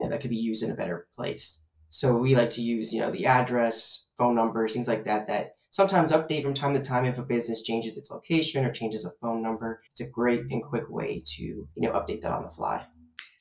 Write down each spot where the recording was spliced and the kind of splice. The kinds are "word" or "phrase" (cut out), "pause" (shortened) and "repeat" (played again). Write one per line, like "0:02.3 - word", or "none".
0:09.9 - pause
0:11.7 - pause

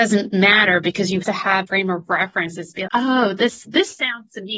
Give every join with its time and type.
0:01.2 - word
0:01.7 - word
0:02.9 - word

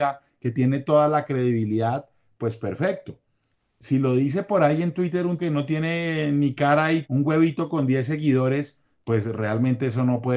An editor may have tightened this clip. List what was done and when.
0:05.4 - word
0:07.0 - word

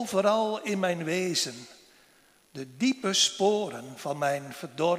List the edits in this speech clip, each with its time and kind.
none

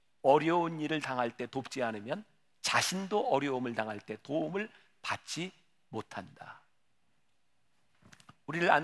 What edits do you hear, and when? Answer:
none

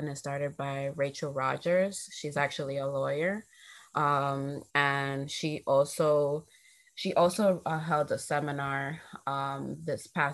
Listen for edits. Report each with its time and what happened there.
0:04.7 - pause

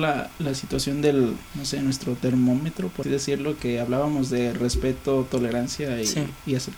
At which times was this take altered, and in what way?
0:01.5 - pause
0:03.0 - word

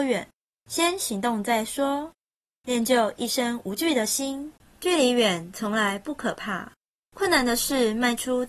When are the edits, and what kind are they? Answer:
none

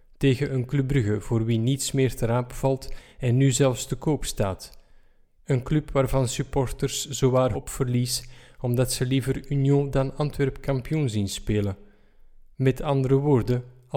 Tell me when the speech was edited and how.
0:07.5 - word

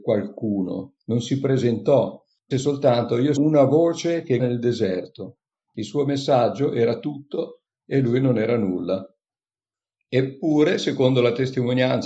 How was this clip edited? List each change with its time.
0:02.5 - word
0:03.4 - word
0:04.4 - word

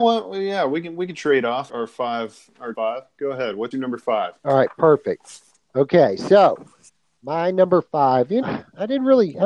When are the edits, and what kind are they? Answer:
0:01.7 - word
0:02.7 - word
0:03.7 - word
0:04.4 - pause
0:06.9 - pause
0:08.4 - word

